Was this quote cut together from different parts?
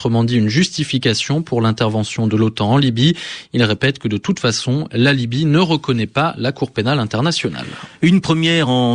no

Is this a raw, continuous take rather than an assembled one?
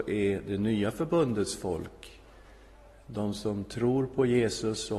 yes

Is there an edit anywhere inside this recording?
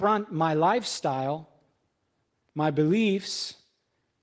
no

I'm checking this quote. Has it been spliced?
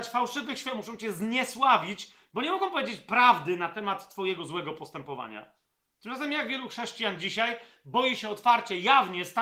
no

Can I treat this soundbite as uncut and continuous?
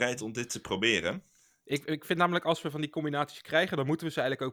yes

